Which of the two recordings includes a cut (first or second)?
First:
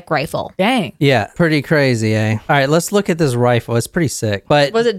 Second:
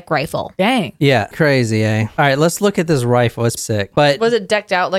second